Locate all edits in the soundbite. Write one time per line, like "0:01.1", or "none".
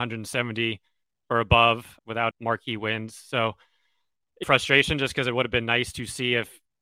0:02.0
0:02.3
0:04.4